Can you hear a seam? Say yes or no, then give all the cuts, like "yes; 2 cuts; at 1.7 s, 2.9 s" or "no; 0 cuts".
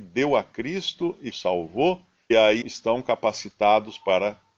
yes; 3 cuts; at 1.3 s, 2.3 s, 2.6 s